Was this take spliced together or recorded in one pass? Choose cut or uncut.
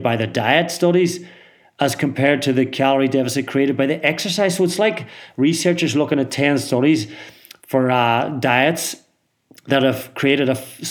uncut